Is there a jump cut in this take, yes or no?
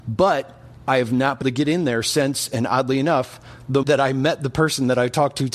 yes